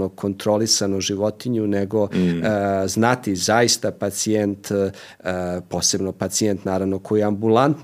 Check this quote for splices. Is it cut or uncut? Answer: uncut